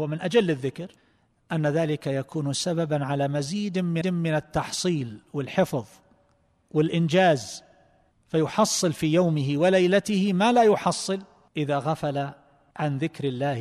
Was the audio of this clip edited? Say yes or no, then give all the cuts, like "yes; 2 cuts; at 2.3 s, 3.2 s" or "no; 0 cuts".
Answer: yes; 1 cut; at 4.0 s